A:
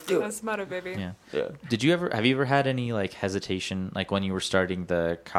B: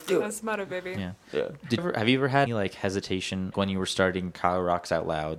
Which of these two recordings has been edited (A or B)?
B